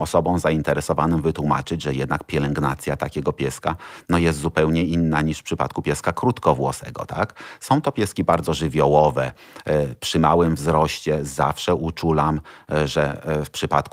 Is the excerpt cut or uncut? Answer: uncut